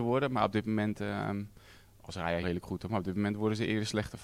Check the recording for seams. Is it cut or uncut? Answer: cut